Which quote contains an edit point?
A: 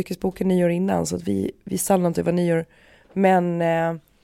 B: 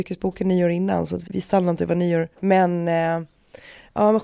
B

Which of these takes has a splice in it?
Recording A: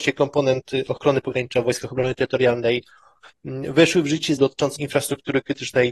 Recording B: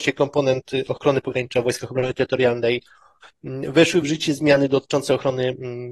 A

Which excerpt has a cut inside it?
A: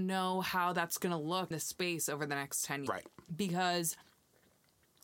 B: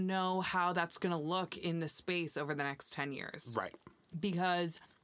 A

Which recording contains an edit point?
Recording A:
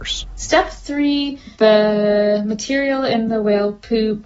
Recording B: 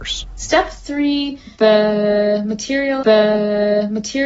B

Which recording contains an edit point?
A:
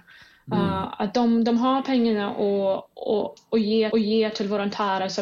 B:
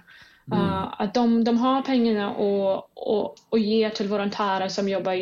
A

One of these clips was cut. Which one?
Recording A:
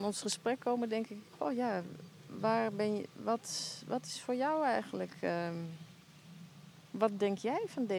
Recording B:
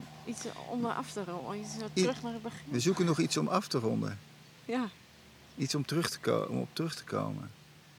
A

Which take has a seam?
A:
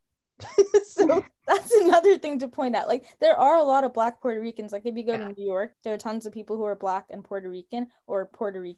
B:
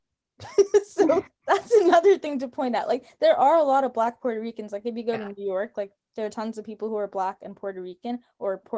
A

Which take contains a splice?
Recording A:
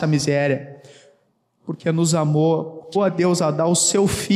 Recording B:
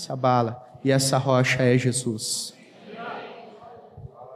A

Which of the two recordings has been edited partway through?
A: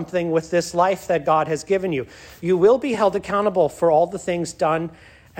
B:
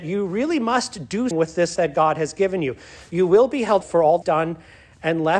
B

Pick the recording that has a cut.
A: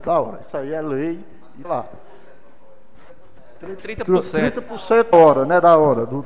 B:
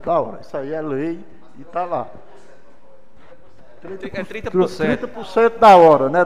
A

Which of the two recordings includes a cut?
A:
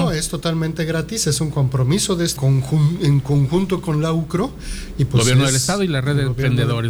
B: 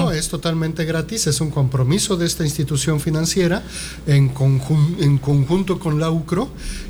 A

